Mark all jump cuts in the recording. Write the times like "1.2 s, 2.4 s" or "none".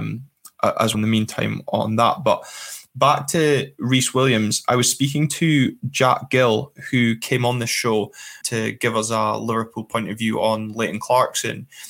0.9 s, 8.4 s